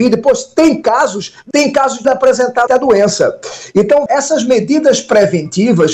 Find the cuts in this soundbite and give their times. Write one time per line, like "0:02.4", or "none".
0:01.5
0:02.0
0:02.7
0:04.1